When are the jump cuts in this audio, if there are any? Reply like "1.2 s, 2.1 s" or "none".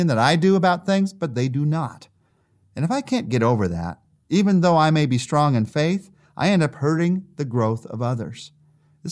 none